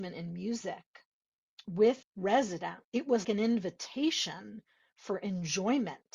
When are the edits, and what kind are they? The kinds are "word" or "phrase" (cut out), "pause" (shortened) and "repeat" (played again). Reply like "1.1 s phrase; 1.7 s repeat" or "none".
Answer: 2.0 s word; 2.8 s pause; 3.2 s word